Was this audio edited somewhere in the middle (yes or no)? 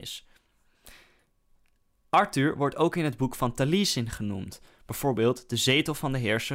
no